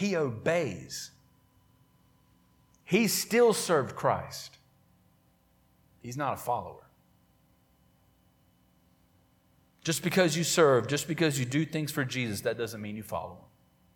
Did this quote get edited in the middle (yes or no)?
no